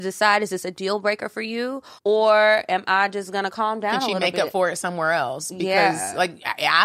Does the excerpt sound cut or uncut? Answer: cut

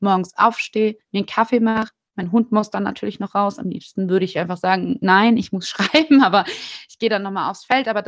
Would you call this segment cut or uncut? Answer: uncut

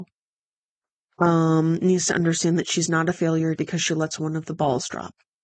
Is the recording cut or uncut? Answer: cut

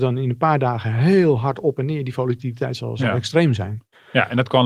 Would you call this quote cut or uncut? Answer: uncut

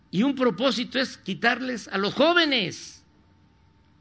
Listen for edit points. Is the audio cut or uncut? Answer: uncut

